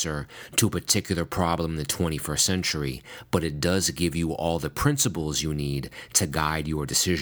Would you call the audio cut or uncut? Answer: uncut